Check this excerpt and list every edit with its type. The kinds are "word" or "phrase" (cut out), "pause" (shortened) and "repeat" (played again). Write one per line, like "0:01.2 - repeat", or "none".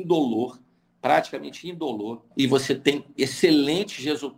0:02.3 - pause

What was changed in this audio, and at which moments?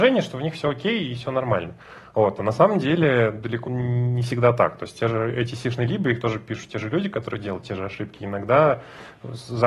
0:03.6 - word

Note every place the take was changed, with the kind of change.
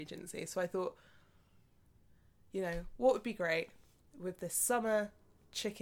none

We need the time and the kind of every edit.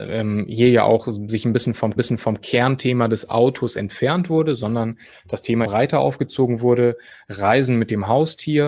0:02.0 - repeat
0:05.6 - word

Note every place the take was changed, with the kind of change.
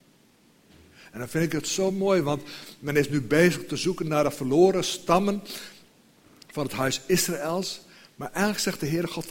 none

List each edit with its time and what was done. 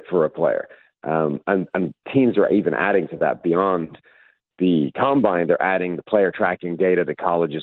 none

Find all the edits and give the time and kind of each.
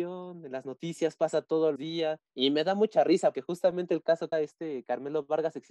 0:01.8 - word
0:02.3 - pause
0:03.3 - word
0:04.3 - word

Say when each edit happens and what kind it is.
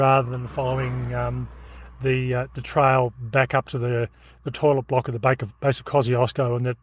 none

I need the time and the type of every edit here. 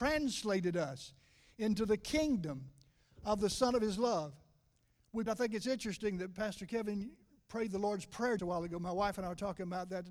0:05.3 - word
0:08.4 - word

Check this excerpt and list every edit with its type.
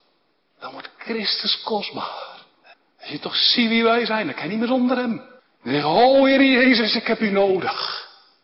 0:02.7 - pause
0:05.4 - pause

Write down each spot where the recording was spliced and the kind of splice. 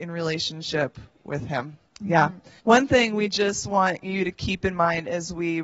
0:01.9 - pause
0:02.6 - pause

